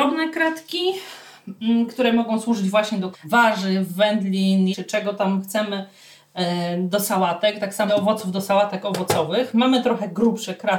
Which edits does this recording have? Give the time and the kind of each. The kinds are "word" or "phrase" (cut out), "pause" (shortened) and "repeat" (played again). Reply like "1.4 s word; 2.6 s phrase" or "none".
3.1 s word; 4.7 s word; 7.9 s word